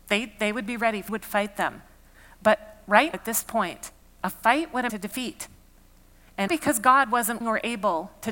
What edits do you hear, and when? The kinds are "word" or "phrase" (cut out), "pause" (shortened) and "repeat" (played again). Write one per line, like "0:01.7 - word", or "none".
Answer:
0:01.1 - phrase
0:03.1 - word
0:04.9 - word
0:06.5 - word
0:07.4 - word